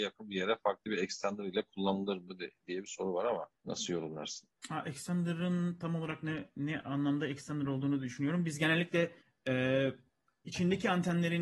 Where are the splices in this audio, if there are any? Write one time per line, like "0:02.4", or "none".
0:03.6
0:04.6
0:09.2